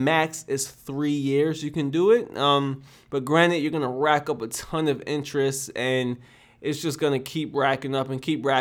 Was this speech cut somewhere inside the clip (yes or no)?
no